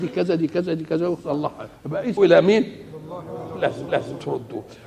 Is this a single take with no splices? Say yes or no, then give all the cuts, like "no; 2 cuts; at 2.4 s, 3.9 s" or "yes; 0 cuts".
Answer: no; 3 cuts; at 1.8 s, 2.2 s, 3.9 s